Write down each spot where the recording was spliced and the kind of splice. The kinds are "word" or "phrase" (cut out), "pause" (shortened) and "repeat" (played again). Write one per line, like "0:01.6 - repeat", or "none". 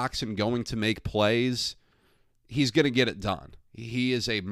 none